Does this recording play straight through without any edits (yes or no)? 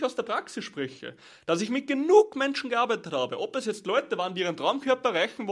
yes